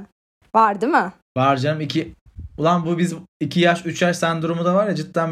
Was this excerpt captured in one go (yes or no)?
yes